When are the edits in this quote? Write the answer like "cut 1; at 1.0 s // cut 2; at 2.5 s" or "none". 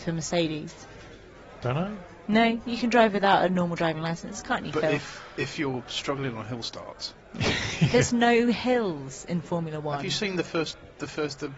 none